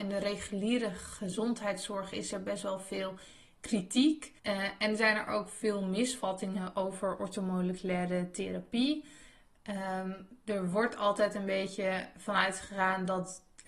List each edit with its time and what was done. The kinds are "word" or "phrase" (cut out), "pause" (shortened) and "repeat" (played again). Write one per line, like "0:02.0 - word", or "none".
0:04.4 - pause